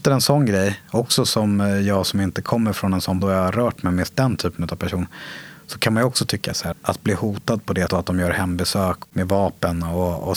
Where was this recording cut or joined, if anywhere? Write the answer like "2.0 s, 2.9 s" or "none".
3.2 s, 6.7 s, 7.9 s